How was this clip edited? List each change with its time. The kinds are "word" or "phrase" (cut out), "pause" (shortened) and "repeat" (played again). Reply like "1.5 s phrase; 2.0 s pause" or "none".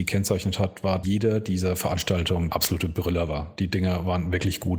1.0 s word; 2.5 s word